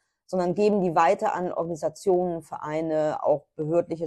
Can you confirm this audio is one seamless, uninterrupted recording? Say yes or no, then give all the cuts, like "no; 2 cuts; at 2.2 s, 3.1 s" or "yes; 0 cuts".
yes; 0 cuts